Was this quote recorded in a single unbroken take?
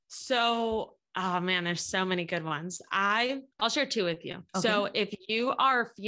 no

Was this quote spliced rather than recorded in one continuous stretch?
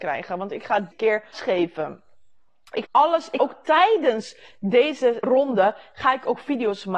yes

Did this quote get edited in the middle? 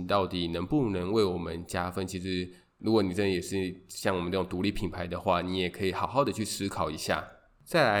no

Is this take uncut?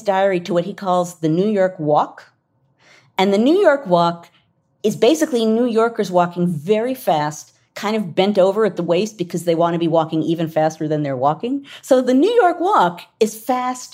yes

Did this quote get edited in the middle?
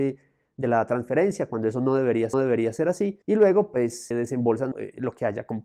yes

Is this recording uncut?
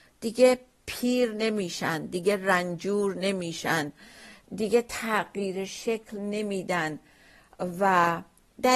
yes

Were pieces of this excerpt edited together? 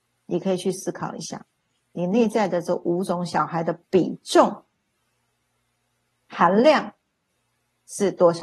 no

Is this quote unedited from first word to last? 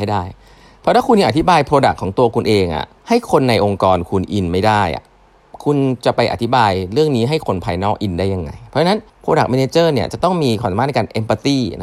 no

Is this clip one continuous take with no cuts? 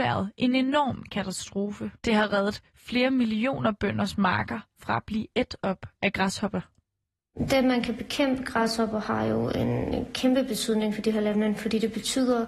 no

